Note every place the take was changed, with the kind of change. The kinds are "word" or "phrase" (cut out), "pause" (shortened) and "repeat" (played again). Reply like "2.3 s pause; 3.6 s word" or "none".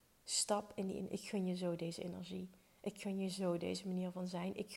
none